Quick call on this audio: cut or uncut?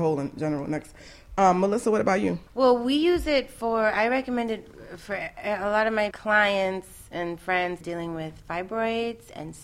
cut